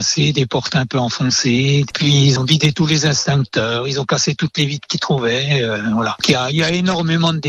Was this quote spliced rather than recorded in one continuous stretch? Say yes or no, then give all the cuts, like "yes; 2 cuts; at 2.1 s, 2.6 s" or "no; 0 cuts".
yes; 1 cut; at 2.4 s